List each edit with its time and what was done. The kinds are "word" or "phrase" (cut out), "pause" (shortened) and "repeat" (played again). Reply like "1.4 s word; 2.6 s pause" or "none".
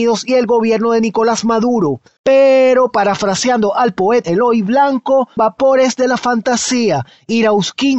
2.2 s pause; 4.2 s word; 5.4 s word